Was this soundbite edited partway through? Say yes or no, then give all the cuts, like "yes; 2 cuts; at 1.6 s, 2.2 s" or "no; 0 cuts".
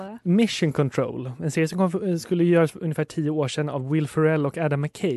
yes; 1 cut; at 2.7 s